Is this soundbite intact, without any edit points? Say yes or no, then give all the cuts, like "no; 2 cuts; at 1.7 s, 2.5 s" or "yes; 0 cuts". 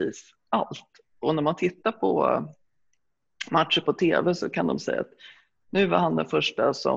yes; 0 cuts